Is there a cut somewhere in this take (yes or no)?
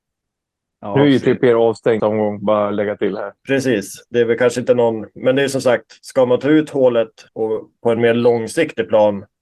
yes